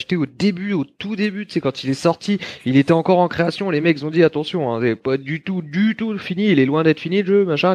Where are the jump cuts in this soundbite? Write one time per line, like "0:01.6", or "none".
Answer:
none